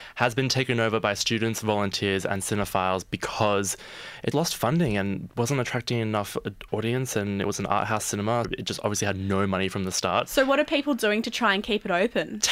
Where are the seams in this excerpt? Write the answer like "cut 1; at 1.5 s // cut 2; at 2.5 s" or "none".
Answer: cut 1; at 4.3 s // cut 2; at 8.4 s